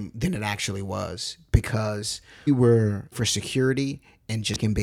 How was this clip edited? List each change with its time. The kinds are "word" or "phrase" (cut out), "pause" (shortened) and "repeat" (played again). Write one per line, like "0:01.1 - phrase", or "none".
0:02.5 - word
0:03.1 - word